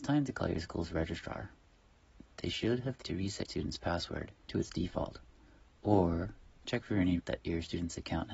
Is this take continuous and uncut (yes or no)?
no